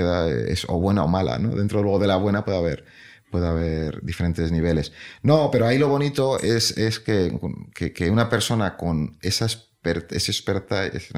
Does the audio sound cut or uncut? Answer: uncut